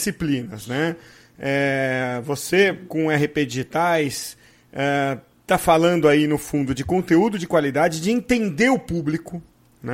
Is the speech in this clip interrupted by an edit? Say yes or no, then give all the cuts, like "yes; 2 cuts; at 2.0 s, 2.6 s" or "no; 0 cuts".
no; 0 cuts